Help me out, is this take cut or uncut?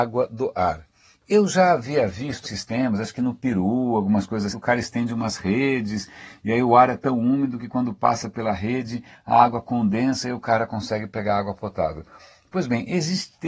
cut